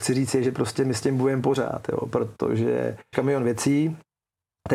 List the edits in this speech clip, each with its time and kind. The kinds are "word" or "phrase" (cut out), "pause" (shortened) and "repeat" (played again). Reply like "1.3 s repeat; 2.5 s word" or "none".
3.1 s word